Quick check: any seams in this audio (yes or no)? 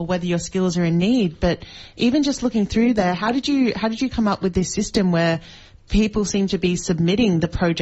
no